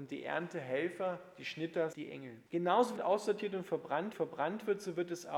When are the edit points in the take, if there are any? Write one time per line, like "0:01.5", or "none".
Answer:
0:01.9
0:02.5
0:03.0
0:04.1